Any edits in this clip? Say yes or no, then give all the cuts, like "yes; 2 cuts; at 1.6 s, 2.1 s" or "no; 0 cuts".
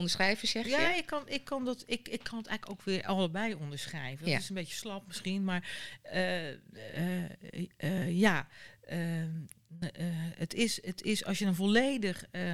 no; 0 cuts